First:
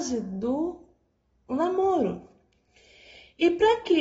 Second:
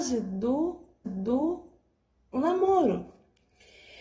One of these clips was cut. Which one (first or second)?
second